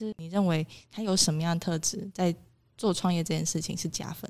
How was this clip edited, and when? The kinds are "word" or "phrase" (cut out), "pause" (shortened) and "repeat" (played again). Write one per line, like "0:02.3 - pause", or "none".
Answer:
none